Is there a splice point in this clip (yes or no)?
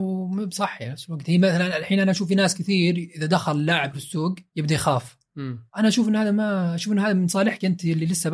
yes